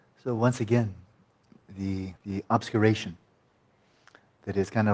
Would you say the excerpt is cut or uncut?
cut